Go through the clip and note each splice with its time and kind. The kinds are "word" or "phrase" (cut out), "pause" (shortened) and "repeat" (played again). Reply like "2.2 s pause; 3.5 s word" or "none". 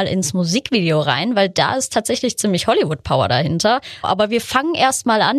none